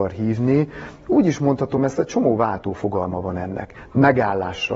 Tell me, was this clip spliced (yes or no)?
no